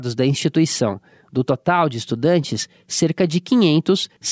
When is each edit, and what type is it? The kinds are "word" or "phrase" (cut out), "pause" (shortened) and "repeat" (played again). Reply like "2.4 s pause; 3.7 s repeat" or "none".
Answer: none